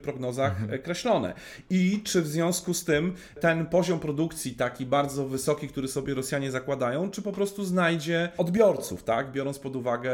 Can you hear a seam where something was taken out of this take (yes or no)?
no